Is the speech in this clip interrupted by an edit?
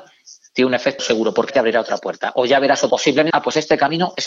yes; 4 cuts; at 1.0 s, 1.5 s, 2.9 s, 3.3 s

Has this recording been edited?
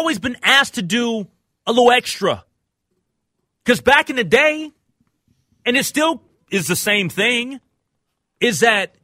no; 0 cuts

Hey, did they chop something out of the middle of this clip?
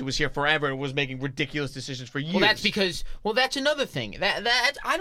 no; 0 cuts

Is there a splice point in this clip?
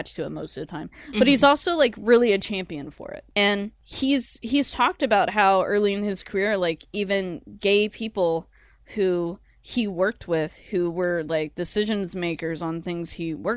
no; 0 cuts

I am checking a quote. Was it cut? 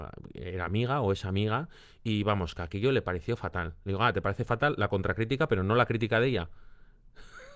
no; 0 cuts

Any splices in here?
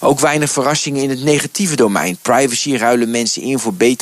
no; 0 cuts

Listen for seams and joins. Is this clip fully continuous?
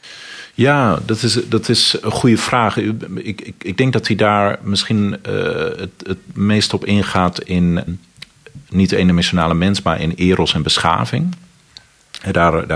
no; 2 cuts; at 7.9 s, 8.6 s

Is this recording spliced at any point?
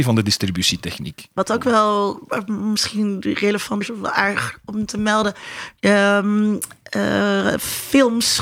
yes; 1 cut; at 3.8 s

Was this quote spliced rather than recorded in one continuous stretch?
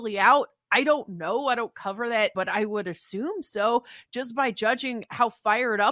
yes; 1 cut; at 2.3 s

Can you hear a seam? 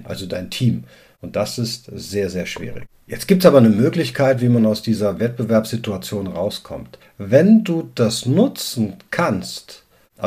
no; 0 cuts

